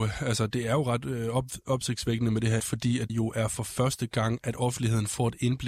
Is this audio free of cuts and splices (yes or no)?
no